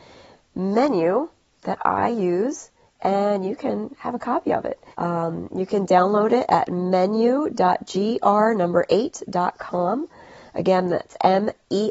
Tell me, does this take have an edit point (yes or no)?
yes